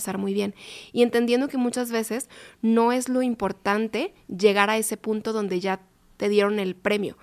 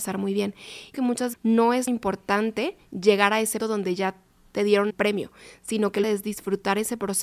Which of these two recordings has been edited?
second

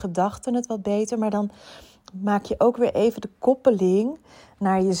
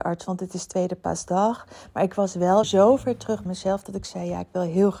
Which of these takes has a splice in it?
second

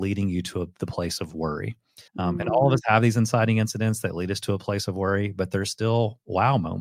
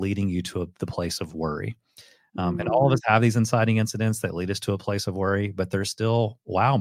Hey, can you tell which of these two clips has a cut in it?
first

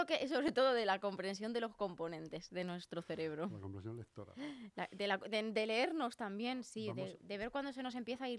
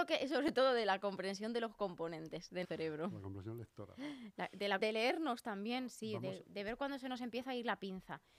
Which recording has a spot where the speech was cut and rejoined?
second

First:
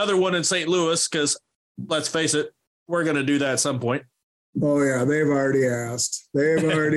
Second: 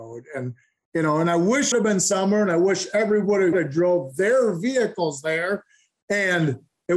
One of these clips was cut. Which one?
second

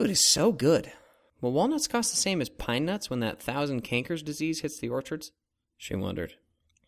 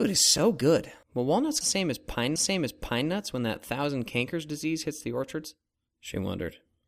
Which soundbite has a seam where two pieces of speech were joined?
second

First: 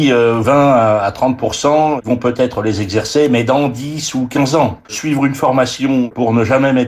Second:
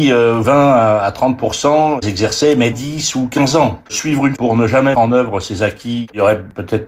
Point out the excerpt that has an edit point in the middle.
second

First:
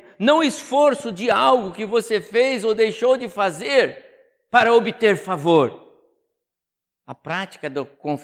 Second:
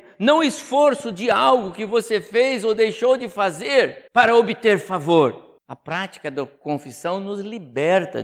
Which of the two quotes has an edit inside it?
second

